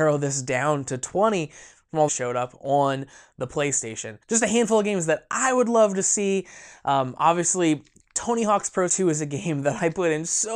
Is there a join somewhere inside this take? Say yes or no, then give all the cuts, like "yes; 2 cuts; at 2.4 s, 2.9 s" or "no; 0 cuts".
yes; 3 cuts; at 2.1 s, 4.2 s, 8.9 s